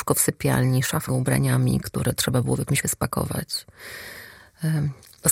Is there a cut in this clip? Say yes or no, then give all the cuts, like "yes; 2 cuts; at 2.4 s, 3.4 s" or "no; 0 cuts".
yes; 2 cuts; at 1.1 s, 2.8 s